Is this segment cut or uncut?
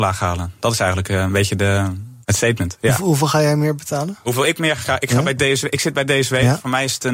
cut